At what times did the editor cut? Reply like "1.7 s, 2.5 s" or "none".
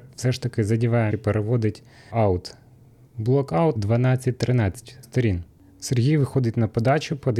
1.1 s, 2.1 s, 3.8 s, 5.0 s